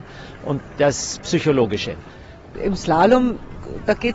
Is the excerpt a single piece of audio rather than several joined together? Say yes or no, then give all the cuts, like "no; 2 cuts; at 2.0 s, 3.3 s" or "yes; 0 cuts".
yes; 0 cuts